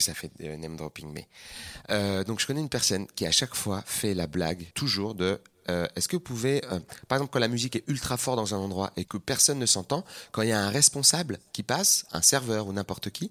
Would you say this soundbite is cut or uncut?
cut